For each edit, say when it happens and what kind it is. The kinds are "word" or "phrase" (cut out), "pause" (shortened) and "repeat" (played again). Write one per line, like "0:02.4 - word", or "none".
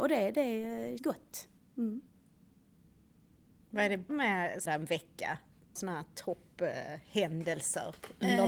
0:01.0 - word
0:01.6 - pause
0:04.1 - word
0:04.7 - phrase
0:05.8 - word